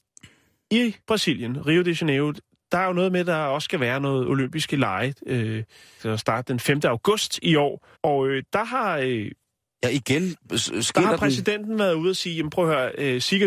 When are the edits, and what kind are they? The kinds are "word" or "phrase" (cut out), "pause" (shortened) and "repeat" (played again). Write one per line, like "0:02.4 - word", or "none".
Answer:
0:01.0 - pause
0:06.0 - phrase
0:08.0 - pause